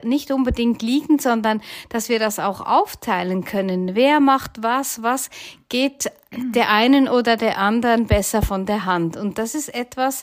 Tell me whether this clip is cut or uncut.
uncut